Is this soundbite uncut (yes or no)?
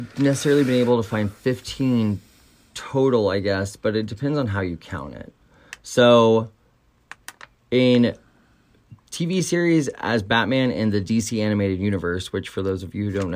yes